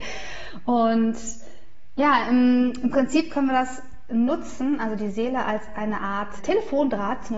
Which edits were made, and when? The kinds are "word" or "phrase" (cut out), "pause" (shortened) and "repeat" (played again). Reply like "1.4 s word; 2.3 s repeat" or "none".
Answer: 6.4 s word